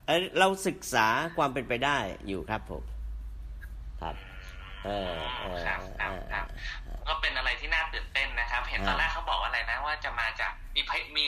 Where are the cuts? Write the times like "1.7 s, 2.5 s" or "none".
none